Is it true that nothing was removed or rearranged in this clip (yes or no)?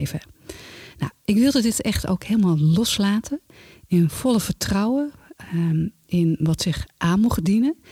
yes